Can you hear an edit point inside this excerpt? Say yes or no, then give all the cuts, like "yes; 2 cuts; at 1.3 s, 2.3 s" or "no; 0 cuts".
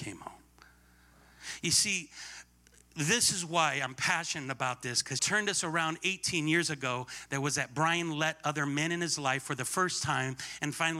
yes; 1 cut; at 5.2 s